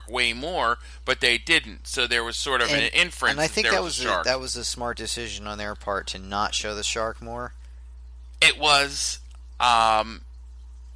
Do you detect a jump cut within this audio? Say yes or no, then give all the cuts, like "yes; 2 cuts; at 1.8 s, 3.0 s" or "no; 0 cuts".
no; 0 cuts